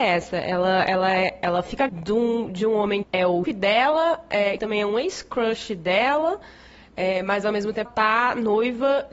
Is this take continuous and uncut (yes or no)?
no